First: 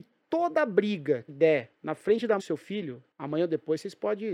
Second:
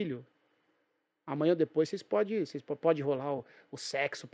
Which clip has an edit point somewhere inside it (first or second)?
first